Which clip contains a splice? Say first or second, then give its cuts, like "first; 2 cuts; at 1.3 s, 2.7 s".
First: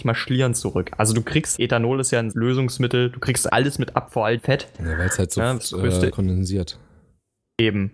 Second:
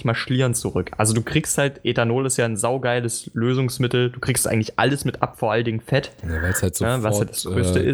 first; 6 cuts; at 1.6 s, 2.3 s, 3.5 s, 4.4 s, 5.6 s, 6.1 s